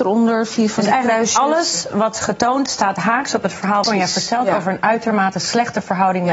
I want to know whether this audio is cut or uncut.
cut